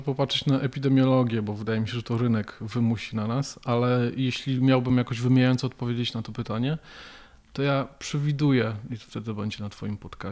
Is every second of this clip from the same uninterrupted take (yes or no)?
yes